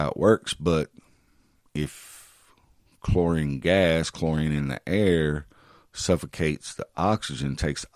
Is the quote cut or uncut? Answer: uncut